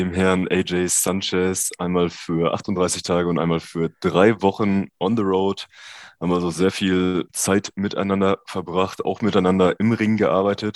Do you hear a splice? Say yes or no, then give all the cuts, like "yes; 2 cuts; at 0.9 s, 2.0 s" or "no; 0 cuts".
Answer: yes; 1 cut; at 7.3 s